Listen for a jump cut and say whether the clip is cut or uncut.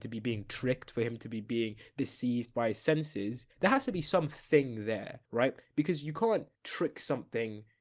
cut